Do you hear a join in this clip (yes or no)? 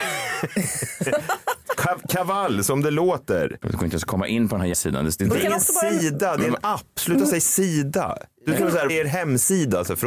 yes